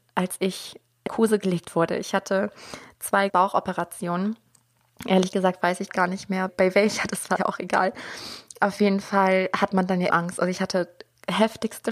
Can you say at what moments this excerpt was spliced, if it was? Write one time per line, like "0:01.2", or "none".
0:01.1
0:03.3
0:05.9
0:06.5
0:07.4
0:10.1